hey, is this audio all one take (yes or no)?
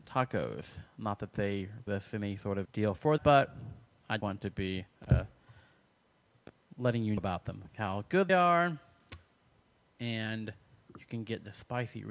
no